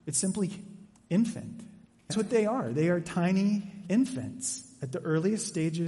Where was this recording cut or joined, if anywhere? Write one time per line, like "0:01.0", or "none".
0:00.9
0:02.1
0:03.8